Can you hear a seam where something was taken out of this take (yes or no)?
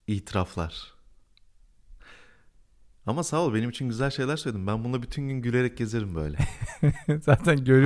no